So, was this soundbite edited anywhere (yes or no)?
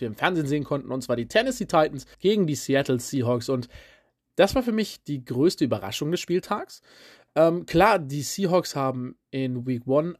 yes